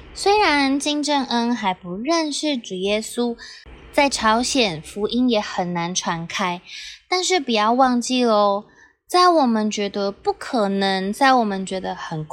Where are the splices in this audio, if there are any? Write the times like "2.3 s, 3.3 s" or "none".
none